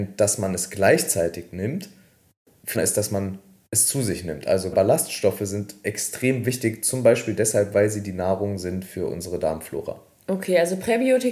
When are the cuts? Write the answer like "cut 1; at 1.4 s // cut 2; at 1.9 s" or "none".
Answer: cut 1; at 2.7 s // cut 2; at 4.7 s